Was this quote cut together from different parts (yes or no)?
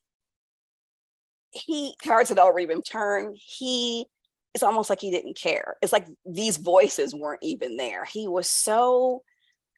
yes